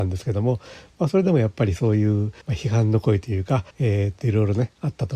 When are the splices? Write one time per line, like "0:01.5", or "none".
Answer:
0:02.4
0:03.7